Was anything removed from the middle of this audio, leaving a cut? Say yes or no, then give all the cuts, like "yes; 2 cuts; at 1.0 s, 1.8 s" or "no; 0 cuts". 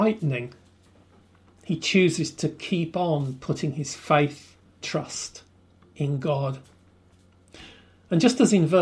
yes; 1 cut; at 4.8 s